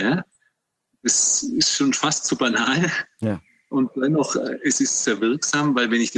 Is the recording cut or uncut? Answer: cut